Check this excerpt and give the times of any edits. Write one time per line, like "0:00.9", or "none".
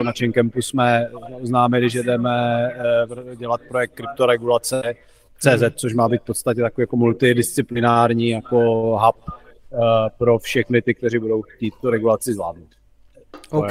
none